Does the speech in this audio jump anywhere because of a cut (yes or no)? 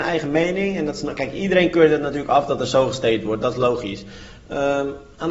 no